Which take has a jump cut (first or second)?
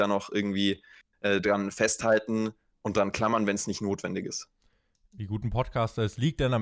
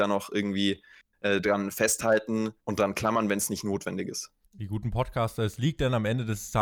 second